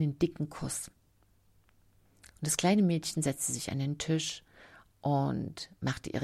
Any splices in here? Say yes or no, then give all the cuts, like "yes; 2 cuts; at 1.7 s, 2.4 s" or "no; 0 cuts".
no; 0 cuts